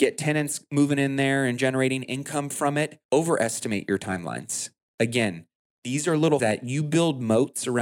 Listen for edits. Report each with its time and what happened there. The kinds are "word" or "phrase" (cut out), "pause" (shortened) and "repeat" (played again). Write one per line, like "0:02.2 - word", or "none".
0:03.0 - pause
0:06.4 - word